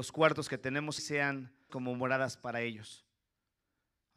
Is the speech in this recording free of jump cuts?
no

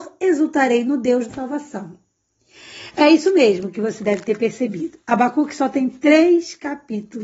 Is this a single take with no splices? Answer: no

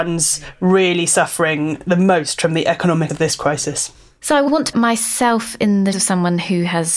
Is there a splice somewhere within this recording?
yes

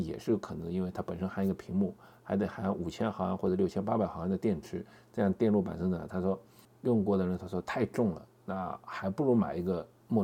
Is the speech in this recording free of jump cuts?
yes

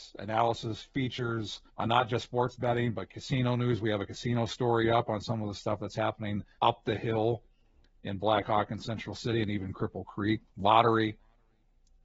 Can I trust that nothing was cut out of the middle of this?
no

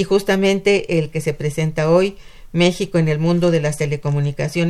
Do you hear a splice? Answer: no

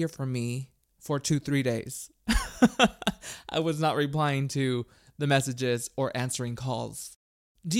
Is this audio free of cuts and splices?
yes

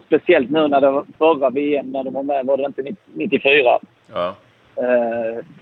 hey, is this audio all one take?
no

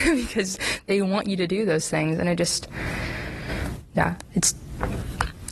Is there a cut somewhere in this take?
no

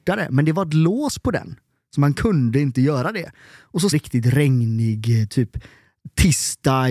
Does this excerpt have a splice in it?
yes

